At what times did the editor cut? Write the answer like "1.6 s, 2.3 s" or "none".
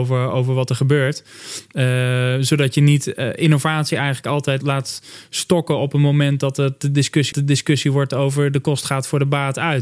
4.6 s, 7.3 s